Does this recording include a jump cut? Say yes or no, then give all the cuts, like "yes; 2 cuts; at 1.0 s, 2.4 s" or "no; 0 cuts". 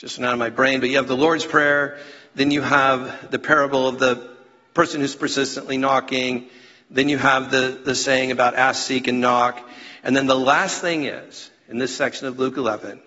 no; 0 cuts